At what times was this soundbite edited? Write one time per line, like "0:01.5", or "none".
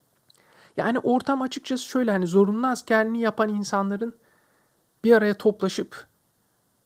none